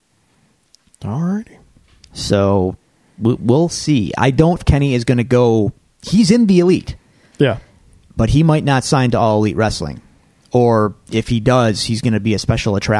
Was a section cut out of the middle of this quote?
yes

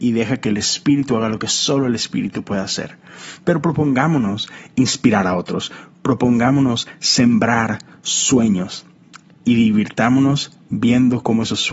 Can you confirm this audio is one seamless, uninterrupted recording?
yes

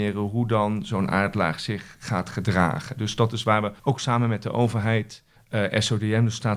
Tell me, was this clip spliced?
yes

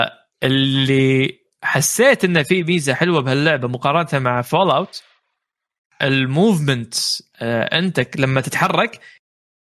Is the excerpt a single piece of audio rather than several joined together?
yes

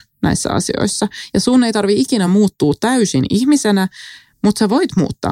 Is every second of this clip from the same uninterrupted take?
yes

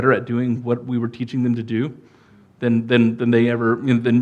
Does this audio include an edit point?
no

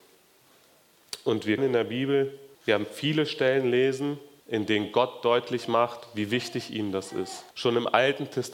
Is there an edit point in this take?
yes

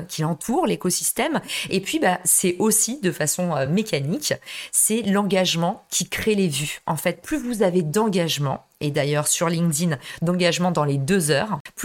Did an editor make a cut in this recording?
no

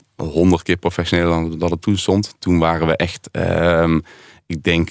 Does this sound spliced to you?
no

